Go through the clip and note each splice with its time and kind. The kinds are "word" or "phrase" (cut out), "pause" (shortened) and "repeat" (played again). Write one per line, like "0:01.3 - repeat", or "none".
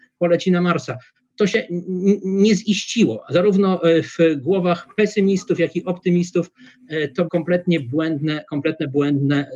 0:07.3 - word